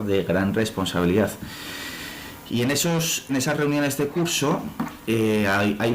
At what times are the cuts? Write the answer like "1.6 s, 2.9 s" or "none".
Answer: 3.3 s